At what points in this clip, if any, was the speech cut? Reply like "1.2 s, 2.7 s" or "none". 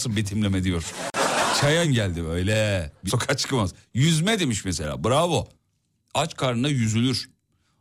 1.8 s, 3.1 s